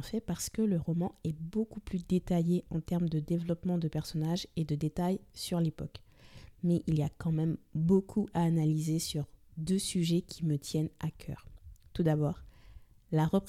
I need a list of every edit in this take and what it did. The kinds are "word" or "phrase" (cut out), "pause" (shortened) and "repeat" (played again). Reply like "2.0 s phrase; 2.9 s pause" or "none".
none